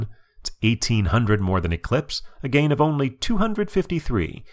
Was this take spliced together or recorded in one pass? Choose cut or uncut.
uncut